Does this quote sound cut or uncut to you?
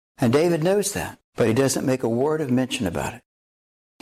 cut